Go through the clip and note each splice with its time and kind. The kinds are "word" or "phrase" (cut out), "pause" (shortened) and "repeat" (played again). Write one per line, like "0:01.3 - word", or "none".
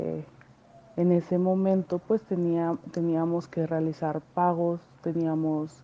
none